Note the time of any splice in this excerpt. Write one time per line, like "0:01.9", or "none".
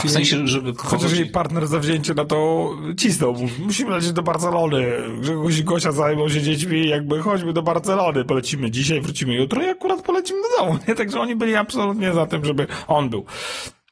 none